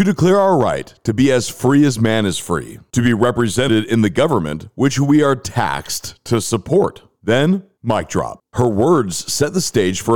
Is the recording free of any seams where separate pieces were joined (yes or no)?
no